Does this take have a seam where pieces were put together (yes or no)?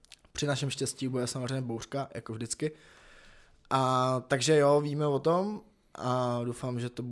no